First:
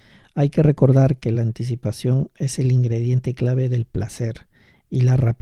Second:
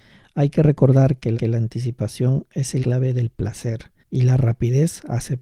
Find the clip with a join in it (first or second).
second